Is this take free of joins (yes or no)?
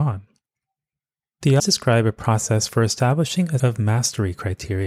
no